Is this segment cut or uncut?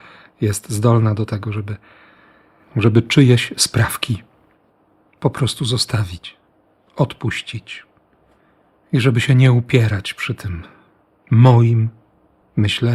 uncut